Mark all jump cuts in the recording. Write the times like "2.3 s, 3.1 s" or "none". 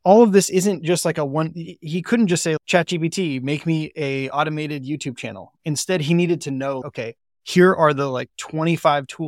none